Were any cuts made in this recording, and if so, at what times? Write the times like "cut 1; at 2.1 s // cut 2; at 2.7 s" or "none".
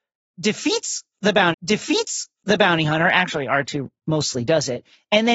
cut 1; at 1.5 s